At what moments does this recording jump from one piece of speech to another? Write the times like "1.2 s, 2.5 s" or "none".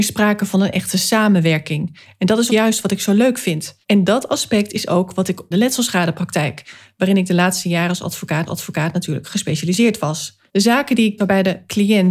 2.5 s, 3.8 s, 5.5 s, 8.5 s, 10.5 s, 11.2 s